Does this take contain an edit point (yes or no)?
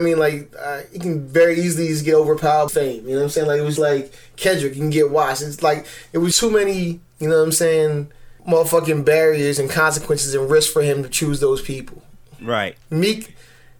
yes